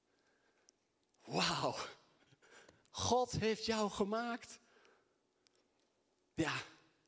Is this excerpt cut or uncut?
uncut